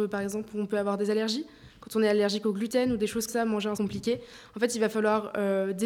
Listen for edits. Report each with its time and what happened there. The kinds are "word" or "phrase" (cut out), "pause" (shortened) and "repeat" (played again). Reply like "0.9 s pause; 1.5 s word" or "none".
3.3 s word; 3.8 s phrase